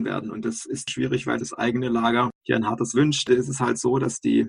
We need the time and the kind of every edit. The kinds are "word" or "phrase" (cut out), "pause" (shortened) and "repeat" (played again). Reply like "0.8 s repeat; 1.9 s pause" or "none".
1.4 s word; 2.9 s word